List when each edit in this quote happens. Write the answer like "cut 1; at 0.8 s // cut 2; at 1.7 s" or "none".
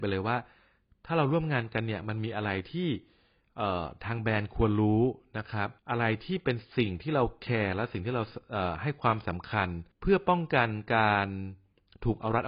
cut 1; at 5.8 s // cut 2; at 9.9 s